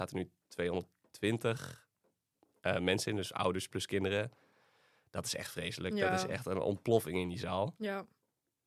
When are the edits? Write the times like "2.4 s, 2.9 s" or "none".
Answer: none